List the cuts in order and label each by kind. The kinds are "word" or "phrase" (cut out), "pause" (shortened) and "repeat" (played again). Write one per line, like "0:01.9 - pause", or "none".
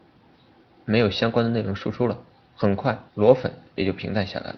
0:03.1 - pause